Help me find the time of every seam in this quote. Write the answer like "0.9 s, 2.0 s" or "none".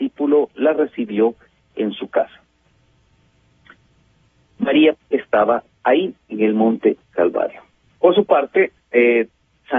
4.9 s